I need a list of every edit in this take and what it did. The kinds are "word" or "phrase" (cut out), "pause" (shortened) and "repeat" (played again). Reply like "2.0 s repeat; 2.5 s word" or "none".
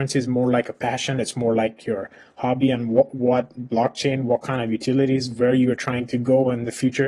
none

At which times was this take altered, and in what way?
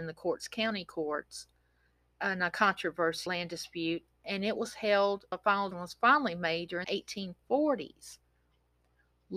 3.3 s word; 5.3 s word; 5.7 s word; 6.8 s word

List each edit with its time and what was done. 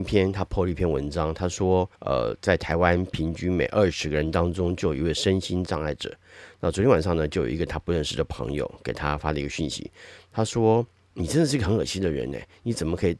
1.9 s pause

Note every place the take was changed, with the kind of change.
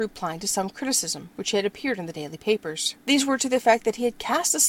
3.0 s pause

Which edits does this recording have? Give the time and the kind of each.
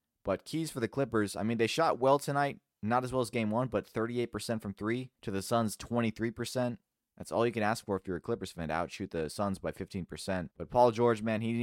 5.2 s pause; 6.9 s pause; 10.5 s pause

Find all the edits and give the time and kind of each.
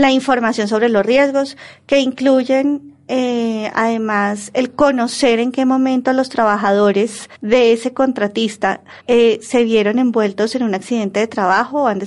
7.3 s pause; 9.0 s pause

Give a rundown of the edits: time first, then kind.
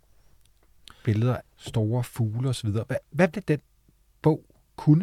1.4 s word; 3.3 s word

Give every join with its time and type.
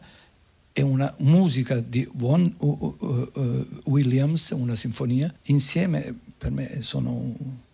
5.4 s pause

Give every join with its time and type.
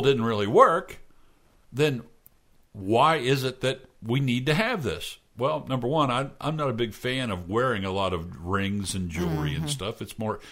5.3 s pause

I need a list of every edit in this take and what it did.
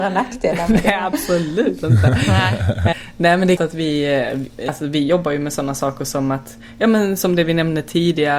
3.6 s word

